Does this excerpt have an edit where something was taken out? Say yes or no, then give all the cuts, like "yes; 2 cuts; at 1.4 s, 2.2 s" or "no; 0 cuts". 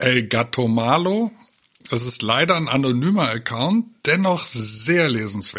no; 0 cuts